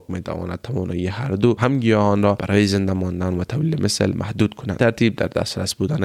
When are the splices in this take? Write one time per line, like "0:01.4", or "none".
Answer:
0:01.6
0:04.8